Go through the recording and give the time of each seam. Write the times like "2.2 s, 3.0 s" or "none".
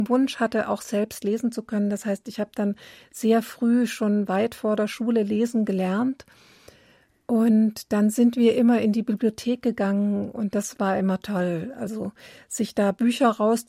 none